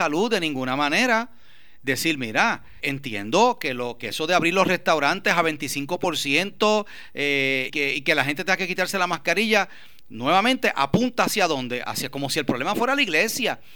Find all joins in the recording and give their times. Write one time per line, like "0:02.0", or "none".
0:02.8
0:07.7

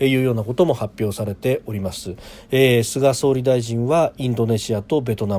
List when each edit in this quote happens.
none

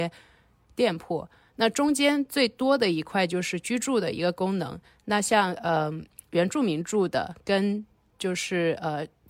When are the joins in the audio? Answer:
none

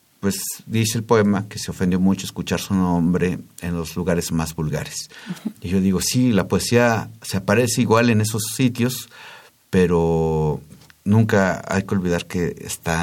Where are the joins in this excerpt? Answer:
none

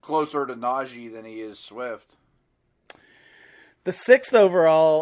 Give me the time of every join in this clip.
none

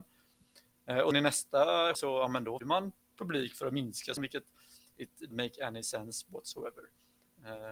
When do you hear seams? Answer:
0:01.1
0:01.9
0:02.6
0:04.2
0:05.3

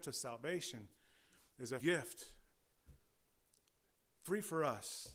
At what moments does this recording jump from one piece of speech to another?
0:01.8

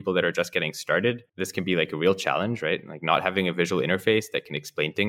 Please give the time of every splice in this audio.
0:01.3

